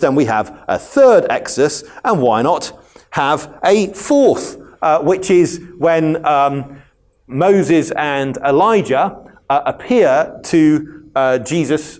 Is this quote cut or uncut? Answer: uncut